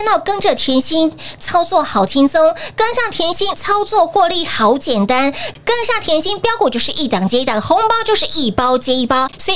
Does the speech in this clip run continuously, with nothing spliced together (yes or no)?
no